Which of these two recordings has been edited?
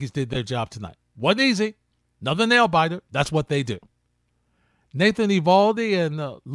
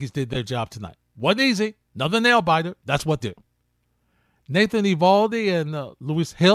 second; 2 cuts; at 1.8 s, 3.2 s

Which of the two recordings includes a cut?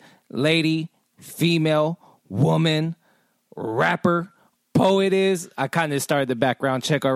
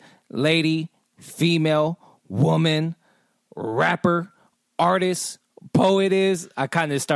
first; 1 cut; at 4.7 s

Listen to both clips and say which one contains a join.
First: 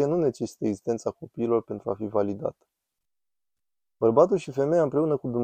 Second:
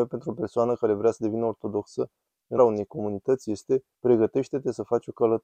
second; 2 cuts; at 2.6 s, 3.9 s

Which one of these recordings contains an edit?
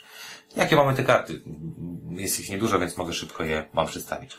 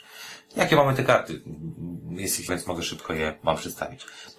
second; 1 cut; at 2.5 s

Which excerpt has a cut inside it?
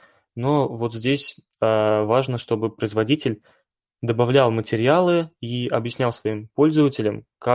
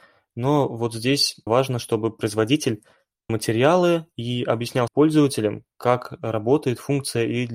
second; 3 cuts; at 1.5 s, 3.3 s, 4.9 s

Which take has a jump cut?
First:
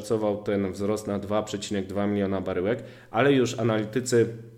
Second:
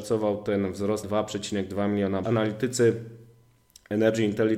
second; 2 cuts; at 1.0 s, 2.2 s

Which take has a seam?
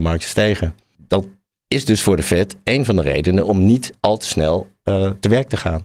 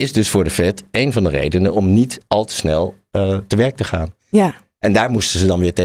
second; 1 cut; at 4.2 s

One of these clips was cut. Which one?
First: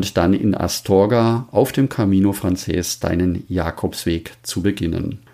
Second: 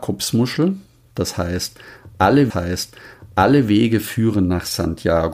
second; 1 cut; at 2.5 s

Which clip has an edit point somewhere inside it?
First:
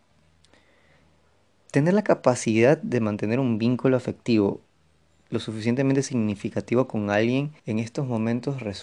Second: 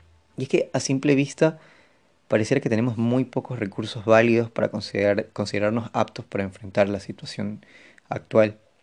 first; 1 cut; at 7.6 s

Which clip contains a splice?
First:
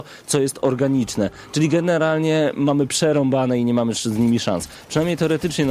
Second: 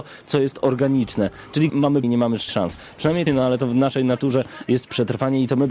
second; 4 cuts; at 1.7 s, 2.0 s, 2.5 s, 3.3 s

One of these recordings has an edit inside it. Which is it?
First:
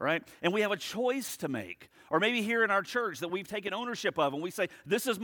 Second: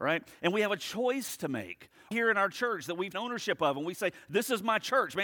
second; 2 cuts; at 2.1 s, 3.1 s

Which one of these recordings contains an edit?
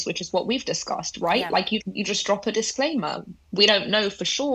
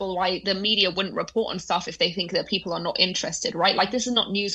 first; 1 cut; at 1.8 s

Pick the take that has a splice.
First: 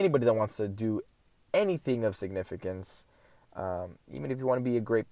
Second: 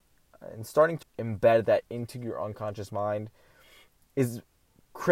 second; 1 cut; at 1.0 s

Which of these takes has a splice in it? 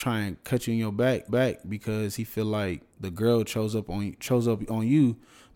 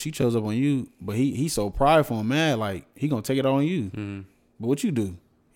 first; 2 cuts; at 1.3 s, 2.9 s

